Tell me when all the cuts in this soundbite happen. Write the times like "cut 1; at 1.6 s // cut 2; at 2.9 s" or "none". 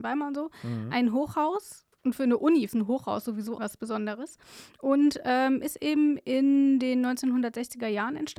cut 1; at 1.9 s // cut 2; at 2.7 s // cut 3; at 3.6 s